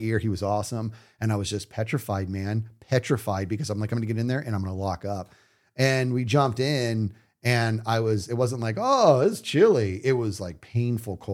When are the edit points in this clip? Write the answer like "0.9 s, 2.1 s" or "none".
none